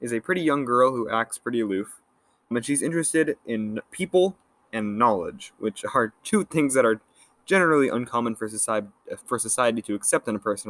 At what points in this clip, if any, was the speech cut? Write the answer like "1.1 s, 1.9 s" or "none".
2.5 s